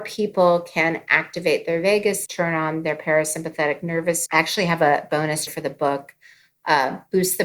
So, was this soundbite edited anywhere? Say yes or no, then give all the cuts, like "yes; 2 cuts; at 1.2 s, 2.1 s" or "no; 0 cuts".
yes; 3 cuts; at 2.3 s, 4.3 s, 5.5 s